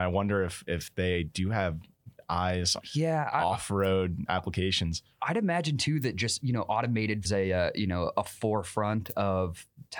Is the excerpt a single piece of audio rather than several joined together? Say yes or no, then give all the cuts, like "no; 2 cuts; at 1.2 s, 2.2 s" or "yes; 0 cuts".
no; 3 cuts; at 2.8 s, 4.3 s, 7.2 s